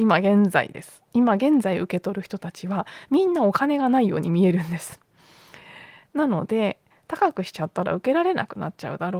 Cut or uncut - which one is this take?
uncut